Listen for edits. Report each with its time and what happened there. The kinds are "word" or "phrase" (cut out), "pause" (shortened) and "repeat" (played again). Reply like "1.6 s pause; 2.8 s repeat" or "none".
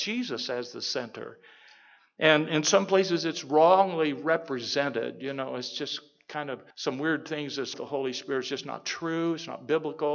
6.7 s pause; 7.7 s phrase